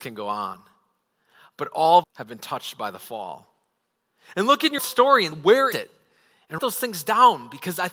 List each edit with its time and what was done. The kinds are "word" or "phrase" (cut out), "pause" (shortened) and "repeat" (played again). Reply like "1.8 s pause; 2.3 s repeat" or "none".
2.0 s word; 4.8 s word; 5.3 s word; 5.7 s word; 6.6 s word